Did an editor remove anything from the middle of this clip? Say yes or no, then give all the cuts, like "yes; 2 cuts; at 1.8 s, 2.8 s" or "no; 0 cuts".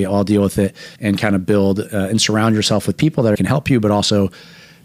yes; 2 cuts; at 1.0 s, 3.3 s